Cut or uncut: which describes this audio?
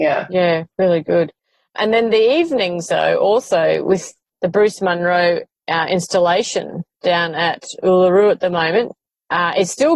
uncut